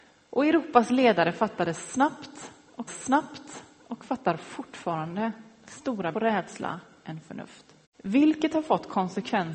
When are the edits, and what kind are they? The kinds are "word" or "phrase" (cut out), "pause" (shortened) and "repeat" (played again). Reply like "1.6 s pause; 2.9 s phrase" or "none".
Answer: 2.9 s repeat; 6.1 s phrase; 7.8 s pause